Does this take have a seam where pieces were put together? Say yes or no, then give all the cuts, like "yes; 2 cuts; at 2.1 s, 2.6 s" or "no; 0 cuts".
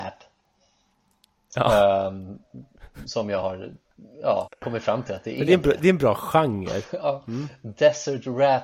no; 0 cuts